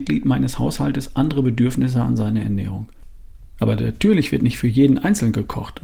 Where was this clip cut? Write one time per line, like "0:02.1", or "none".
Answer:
none